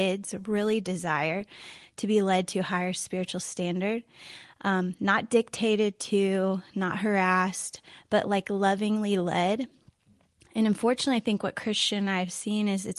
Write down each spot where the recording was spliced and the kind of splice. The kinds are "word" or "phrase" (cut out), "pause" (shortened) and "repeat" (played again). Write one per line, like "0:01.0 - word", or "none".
none